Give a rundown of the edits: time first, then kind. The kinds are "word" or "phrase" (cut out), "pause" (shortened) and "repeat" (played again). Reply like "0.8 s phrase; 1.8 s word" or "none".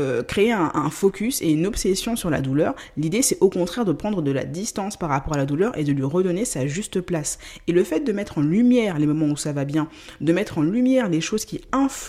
none